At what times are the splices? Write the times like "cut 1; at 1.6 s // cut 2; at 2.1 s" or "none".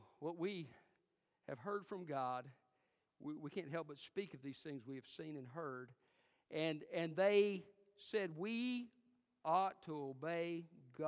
none